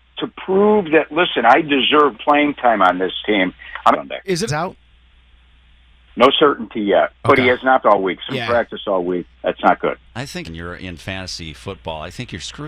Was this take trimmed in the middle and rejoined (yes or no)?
yes